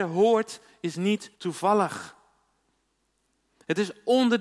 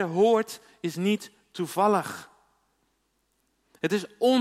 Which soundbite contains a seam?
first; 1 cut; at 1.3 s

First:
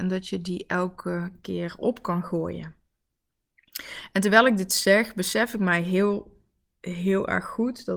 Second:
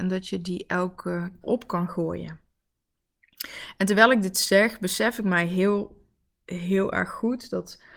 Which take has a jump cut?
second; 1 cut; at 1.4 s

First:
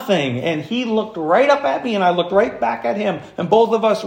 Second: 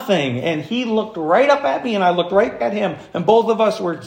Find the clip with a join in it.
second; 1 cut; at 2.6 s

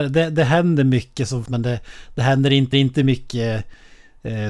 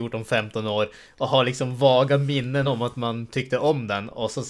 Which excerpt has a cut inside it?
first; 2 cuts; at 1.5 s, 2.7 s

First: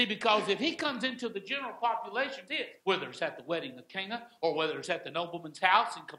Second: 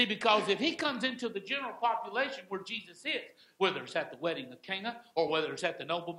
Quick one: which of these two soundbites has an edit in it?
first; 2 cuts; at 2.5 s, 2.8 s

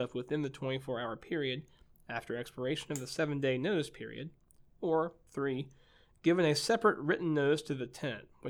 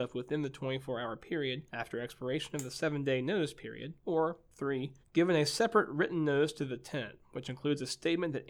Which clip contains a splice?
second; 3 cuts; at 1.7 s, 4.0 s, 5.0 s

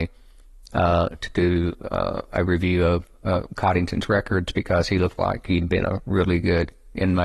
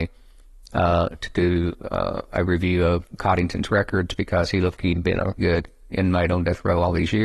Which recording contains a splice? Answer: second; 3 cuts; at 3.1 s, 4.8 s, 5.4 s

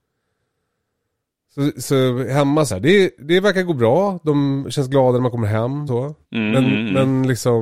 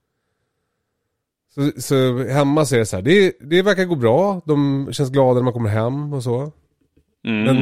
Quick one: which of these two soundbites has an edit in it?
first; 3 cuts; at 2.7 s, 5.9 s, 6.2 s

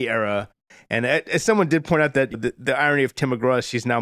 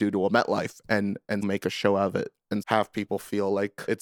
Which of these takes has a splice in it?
second; 2 cuts; at 1.4 s, 2.6 s

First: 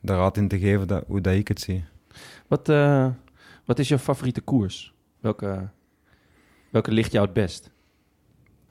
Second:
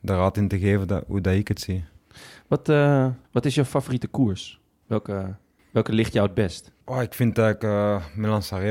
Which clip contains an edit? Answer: second; 3 cuts; at 3.2 s, 5.6 s, 6.8 s

